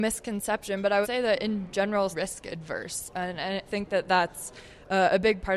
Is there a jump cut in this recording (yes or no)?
yes